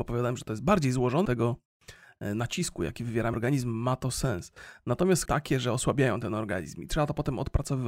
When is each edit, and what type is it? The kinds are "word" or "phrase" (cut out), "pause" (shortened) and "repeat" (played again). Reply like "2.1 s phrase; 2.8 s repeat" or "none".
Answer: 1.2 s phrase; 3.3 s word; 5.2 s phrase